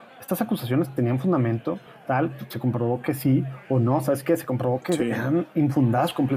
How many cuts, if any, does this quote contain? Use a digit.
0